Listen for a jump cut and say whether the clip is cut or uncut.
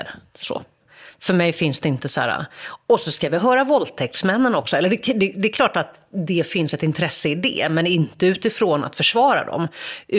uncut